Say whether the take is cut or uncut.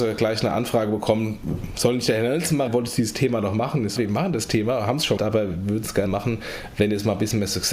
cut